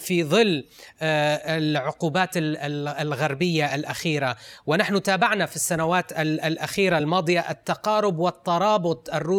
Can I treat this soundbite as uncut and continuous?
yes; 0 cuts

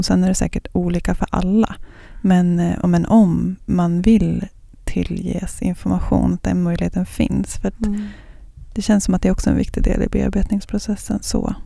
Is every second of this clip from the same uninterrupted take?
yes; 0 cuts

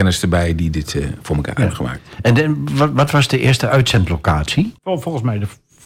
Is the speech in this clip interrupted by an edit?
yes; 1 cut; at 4.8 s

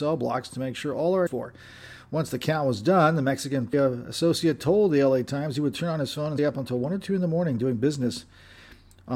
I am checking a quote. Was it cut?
yes; 3 cuts; at 1.3 s, 3.7 s, 6.4 s

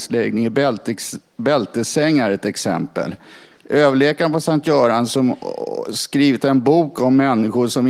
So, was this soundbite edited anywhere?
no; 0 cuts

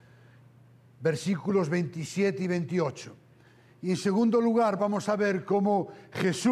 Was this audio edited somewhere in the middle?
no; 0 cuts

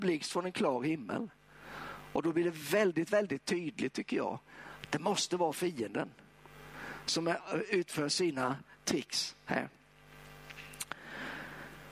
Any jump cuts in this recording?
no; 0 cuts

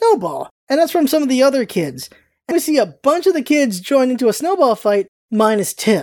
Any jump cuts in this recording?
yes; 1 cut; at 2.5 s

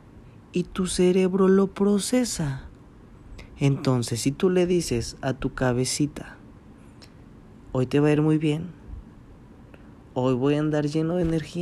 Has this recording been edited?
no; 0 cuts

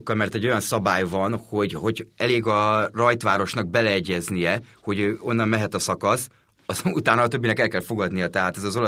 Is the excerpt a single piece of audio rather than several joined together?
yes; 0 cuts

